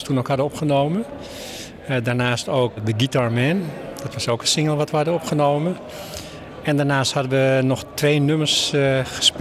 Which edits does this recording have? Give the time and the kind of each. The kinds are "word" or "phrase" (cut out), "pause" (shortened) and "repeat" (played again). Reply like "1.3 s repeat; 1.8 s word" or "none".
2.8 s word